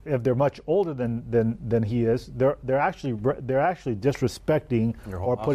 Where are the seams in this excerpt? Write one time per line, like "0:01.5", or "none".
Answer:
none